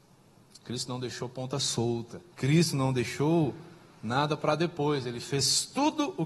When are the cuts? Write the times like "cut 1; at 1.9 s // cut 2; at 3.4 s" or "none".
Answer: cut 1; at 2.3 s